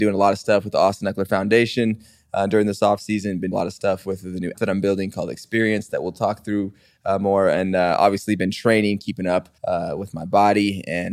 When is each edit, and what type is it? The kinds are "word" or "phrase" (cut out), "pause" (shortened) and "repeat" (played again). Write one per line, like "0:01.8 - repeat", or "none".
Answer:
0:03.5 - phrase
0:04.5 - word
0:09.6 - pause